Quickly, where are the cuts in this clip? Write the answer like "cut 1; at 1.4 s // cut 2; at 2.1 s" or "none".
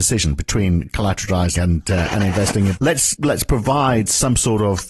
cut 1; at 1.6 s // cut 2; at 2.8 s // cut 3; at 3.1 s